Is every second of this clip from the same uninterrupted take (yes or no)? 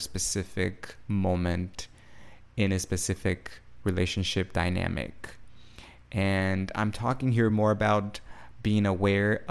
yes